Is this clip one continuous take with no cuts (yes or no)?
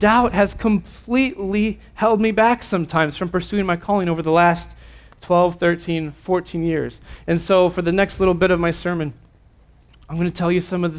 yes